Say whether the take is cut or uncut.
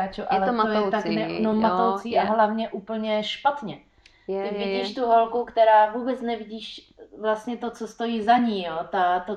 uncut